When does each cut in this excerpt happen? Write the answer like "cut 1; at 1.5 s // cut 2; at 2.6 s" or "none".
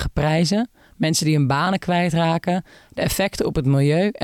none

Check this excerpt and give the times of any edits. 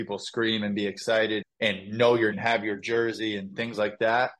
cut 1; at 1.4 s // cut 2; at 2.3 s

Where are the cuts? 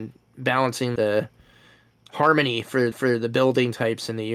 cut 1; at 1.0 s // cut 2; at 2.9 s

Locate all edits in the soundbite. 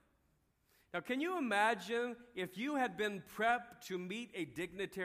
none

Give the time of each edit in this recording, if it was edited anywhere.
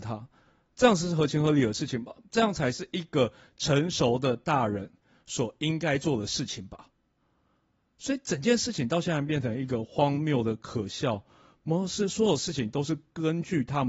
none

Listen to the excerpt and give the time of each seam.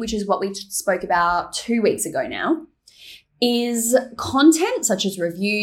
none

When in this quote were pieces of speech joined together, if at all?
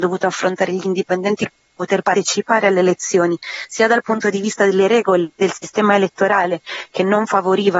cut 1; at 5.4 s

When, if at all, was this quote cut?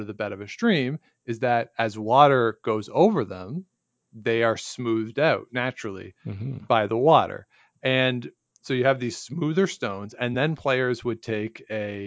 none

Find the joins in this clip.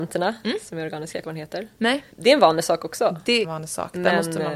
cut 1; at 1.2 s // cut 2; at 2.1 s // cut 3; at 3.4 s

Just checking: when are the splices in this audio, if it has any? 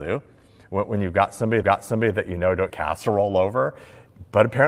cut 1; at 1.6 s // cut 2; at 2.7 s

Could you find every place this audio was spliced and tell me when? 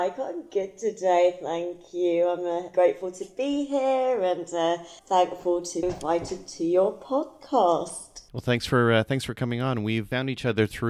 cut 1; at 2.7 s // cut 2; at 5.0 s // cut 3; at 5.8 s // cut 4; at 8.3 s

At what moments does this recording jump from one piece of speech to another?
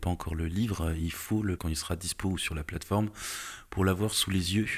cut 1; at 1.6 s

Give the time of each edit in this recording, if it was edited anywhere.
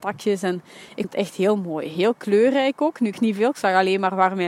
cut 1; at 1.0 s // cut 2; at 3.1 s

